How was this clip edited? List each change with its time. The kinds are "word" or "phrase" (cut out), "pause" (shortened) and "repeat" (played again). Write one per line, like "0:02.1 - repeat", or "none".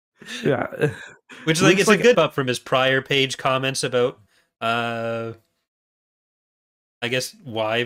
0:02.1 - word